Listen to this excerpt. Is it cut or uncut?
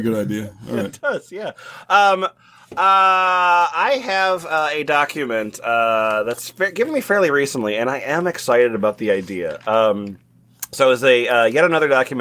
uncut